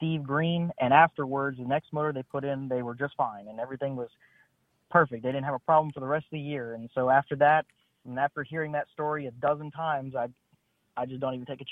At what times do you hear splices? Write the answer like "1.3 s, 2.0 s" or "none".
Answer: none